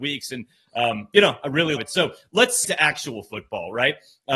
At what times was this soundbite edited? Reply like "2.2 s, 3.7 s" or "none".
1.8 s, 2.6 s